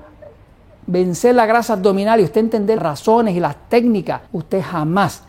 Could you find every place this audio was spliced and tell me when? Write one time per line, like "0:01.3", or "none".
0:02.8
0:04.3

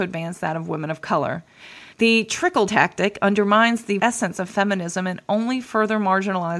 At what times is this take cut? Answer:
0:01.9
0:02.7
0:04.0

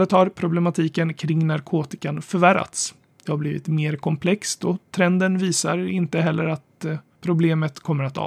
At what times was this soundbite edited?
none

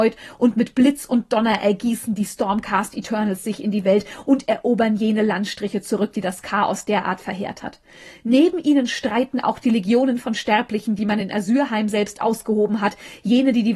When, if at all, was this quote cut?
none

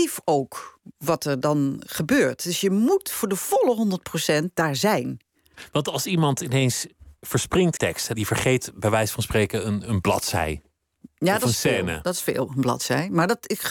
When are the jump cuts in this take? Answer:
0:07.8
0:08.1

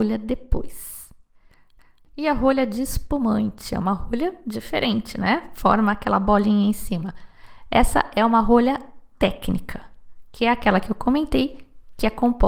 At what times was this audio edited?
none

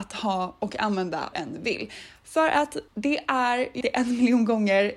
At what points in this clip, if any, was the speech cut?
0:01.3
0:02.9
0:03.8

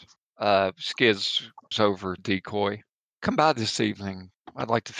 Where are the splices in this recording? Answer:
0:01.7
0:02.2

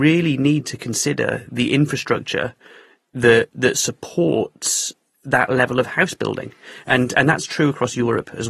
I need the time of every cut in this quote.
none

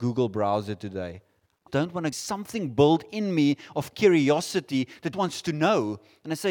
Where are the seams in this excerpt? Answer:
0:01.7
0:02.1
0:05.1

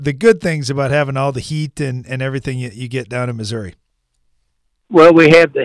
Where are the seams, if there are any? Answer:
none

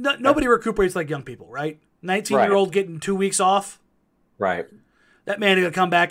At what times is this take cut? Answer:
none

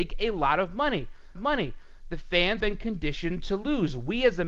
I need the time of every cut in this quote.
0:01.4
0:02.6

